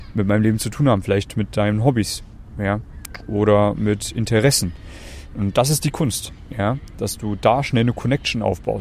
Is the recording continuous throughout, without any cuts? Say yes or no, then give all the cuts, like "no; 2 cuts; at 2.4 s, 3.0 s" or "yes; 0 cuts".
yes; 0 cuts